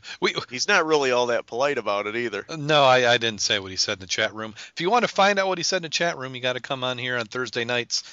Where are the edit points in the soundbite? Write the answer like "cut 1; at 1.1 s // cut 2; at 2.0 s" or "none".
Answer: none